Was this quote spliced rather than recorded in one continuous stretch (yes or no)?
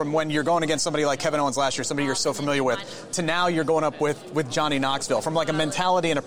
no